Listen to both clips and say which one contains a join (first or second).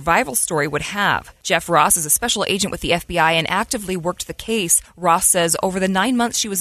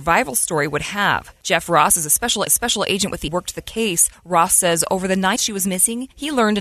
second